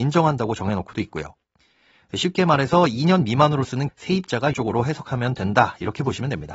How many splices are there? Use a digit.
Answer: 2